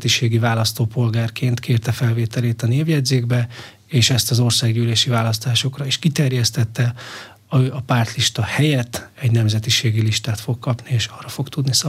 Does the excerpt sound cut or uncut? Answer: uncut